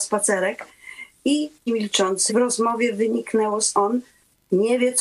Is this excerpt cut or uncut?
cut